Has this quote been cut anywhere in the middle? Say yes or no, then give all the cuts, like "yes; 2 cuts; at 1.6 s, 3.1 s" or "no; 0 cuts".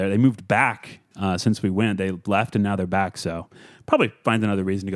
no; 0 cuts